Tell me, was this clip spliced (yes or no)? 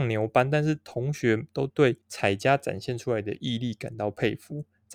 yes